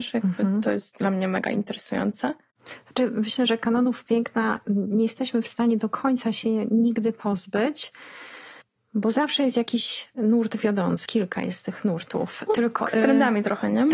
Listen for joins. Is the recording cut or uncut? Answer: cut